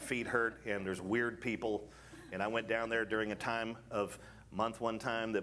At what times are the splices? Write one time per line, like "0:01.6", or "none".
none